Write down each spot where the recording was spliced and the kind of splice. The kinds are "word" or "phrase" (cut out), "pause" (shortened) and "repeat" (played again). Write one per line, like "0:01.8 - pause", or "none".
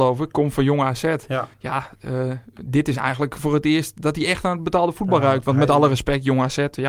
0:01.5 - pause